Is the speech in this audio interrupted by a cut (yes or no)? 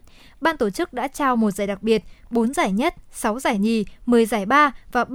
no